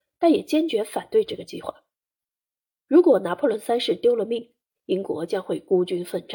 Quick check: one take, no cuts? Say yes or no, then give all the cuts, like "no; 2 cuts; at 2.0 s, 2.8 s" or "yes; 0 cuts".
yes; 0 cuts